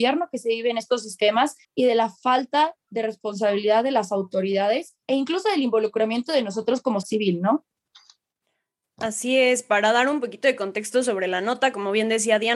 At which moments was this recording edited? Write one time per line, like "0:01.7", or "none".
0:01.6
0:05.0
0:07.0